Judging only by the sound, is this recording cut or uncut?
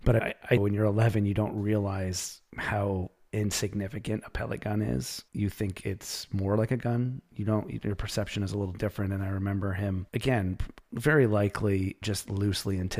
cut